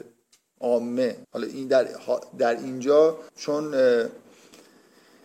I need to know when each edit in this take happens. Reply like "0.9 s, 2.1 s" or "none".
1.2 s, 3.3 s